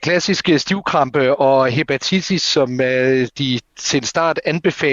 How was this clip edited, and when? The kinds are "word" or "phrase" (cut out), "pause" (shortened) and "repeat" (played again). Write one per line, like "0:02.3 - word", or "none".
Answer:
none